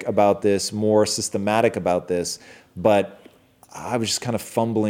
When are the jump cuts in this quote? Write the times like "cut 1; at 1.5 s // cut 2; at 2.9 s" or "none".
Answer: none